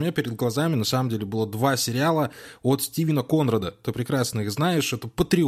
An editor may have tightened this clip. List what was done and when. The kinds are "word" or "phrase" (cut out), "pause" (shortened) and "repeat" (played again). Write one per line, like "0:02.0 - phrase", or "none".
none